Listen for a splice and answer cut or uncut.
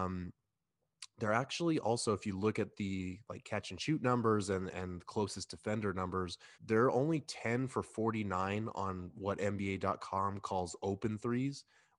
cut